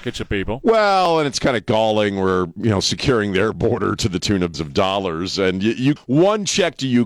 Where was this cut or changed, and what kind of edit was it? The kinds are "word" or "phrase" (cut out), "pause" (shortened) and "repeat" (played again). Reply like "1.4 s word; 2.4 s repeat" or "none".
4.5 s word; 6.0 s word